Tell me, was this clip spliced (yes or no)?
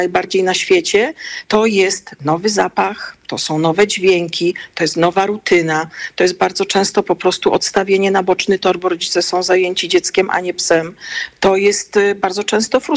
no